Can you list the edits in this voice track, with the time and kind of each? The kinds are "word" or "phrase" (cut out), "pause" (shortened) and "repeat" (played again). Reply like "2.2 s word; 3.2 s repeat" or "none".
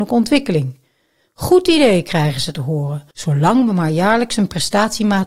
3.1 s pause